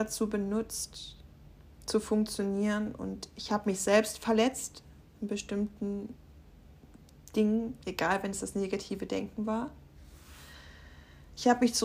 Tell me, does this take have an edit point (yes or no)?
no